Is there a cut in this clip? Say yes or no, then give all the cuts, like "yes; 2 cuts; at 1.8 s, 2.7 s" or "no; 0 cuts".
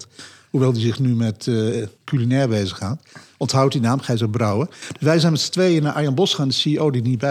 yes; 1 cut; at 2.0 s